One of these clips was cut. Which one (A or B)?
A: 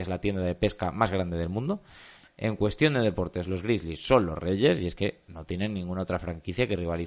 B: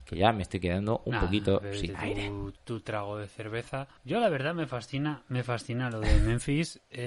B